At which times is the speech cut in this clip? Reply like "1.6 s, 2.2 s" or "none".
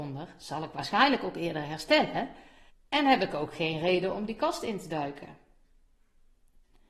2.7 s